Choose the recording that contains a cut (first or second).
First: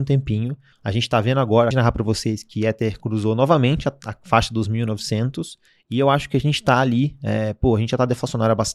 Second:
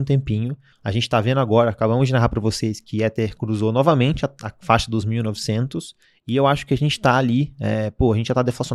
first